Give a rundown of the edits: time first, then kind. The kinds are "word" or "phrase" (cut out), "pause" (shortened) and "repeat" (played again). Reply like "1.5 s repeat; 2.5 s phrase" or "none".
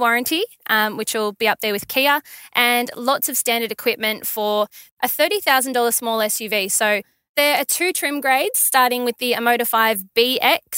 none